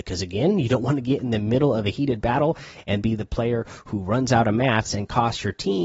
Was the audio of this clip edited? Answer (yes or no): yes